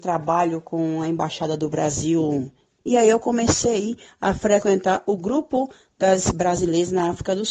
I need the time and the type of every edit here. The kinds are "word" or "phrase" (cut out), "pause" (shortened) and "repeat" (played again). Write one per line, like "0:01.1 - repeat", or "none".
none